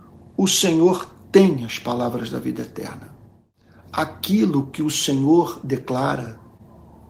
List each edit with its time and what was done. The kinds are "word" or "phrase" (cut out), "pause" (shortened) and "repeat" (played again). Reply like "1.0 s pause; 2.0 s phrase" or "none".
none